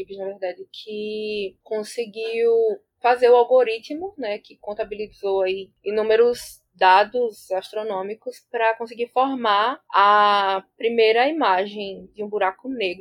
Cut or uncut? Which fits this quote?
uncut